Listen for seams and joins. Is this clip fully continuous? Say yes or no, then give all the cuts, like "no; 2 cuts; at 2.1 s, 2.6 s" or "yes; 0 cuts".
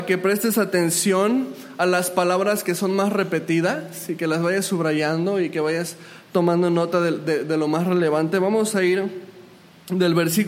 yes; 0 cuts